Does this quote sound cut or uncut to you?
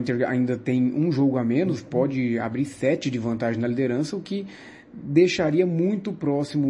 uncut